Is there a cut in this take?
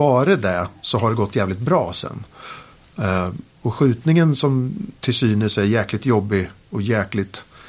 yes; 2 cuts; at 4.9 s, 6.6 s

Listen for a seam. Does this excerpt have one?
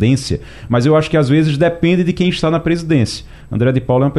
no; 0 cuts

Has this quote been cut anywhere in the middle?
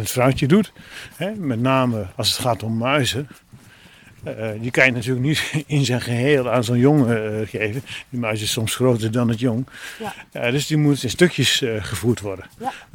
no; 0 cuts

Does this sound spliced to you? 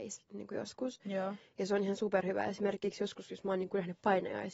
no; 0 cuts

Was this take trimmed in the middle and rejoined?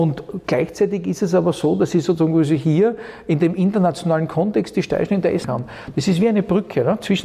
yes; 1 cut; at 5.4 s

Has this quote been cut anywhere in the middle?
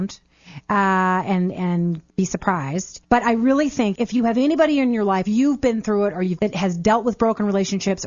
yes; 5 cuts; at 2.1 s, 3.0 s, 3.9 s, 5.2 s, 6.4 s

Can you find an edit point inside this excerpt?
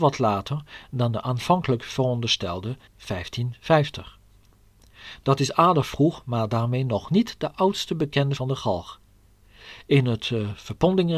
yes; 2 cuts; at 2.9 s, 8.4 s

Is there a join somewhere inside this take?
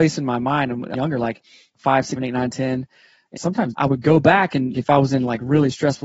yes; 5 cuts; at 0.9 s, 2.2 s, 3.4 s, 3.7 s, 4.7 s

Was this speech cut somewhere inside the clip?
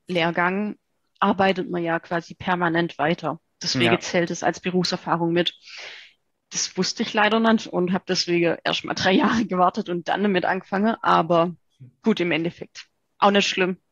no; 0 cuts

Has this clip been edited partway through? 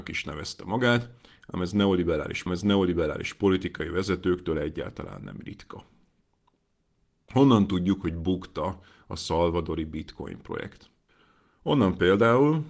yes; 1 cut; at 2.5 s

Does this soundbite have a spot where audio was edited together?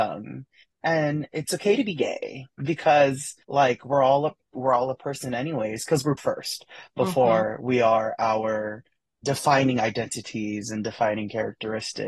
yes; 3 cuts; at 3.4 s, 6.2 s, 9.2 s

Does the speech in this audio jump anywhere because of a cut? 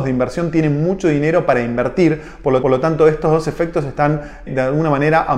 yes; 2 cuts; at 2.6 s, 4.5 s

